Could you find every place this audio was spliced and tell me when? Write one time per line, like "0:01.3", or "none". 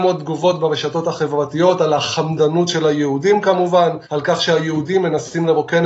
0:04.0